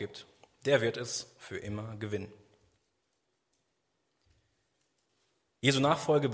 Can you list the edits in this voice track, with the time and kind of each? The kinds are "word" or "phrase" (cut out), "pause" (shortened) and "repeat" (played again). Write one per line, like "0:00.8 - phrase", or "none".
none